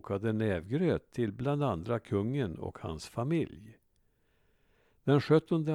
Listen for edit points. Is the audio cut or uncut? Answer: uncut